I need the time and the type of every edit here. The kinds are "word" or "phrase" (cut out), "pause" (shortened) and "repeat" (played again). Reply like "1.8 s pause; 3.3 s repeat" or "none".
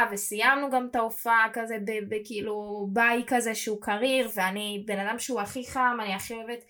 none